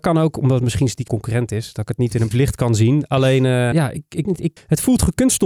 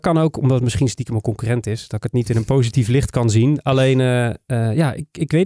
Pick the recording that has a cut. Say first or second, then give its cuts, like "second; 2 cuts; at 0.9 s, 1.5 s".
first; 5 cuts; at 1.1 s, 2.3 s, 3.7 s, 4.2 s, 4.6 s